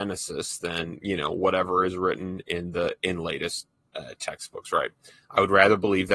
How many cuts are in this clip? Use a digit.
0